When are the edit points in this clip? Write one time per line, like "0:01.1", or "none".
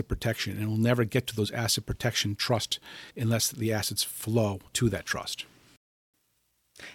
0:03.1
0:04.7